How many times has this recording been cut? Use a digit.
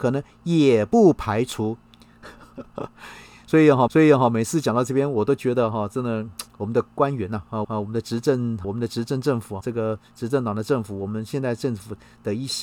5